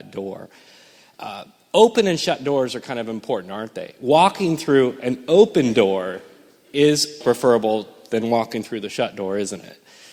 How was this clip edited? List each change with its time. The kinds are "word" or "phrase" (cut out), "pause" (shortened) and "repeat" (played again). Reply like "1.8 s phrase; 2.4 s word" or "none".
7.2 s word